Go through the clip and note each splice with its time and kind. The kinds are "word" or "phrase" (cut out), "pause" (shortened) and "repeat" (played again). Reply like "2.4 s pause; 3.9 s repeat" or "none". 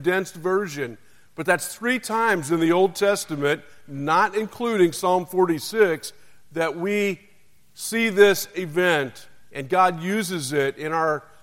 none